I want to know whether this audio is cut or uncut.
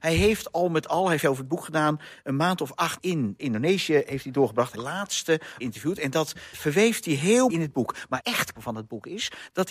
cut